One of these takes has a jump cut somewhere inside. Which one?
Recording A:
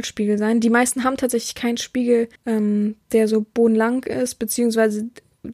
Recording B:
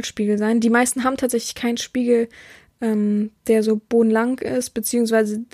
A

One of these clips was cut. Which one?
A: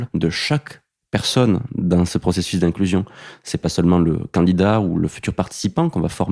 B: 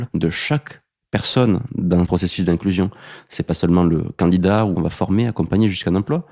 B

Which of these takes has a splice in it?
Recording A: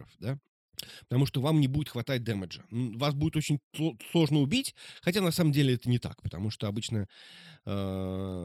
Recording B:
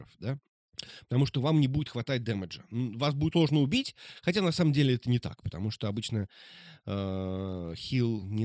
B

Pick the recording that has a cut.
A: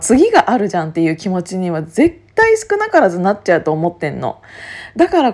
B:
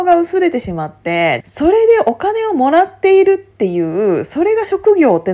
B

